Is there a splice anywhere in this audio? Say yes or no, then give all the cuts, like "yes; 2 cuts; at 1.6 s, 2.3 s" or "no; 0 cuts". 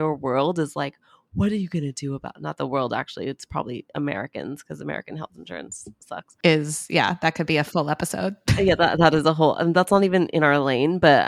no; 0 cuts